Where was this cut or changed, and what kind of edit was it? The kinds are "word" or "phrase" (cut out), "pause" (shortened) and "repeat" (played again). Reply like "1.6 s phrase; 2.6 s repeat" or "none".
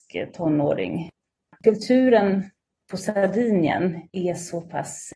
none